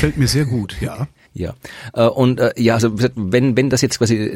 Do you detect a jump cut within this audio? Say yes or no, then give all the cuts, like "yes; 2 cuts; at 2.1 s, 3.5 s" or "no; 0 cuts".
yes; 1 cut; at 1.2 s